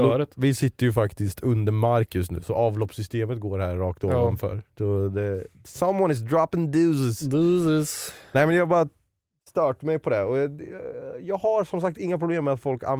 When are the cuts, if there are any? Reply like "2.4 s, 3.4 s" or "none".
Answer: none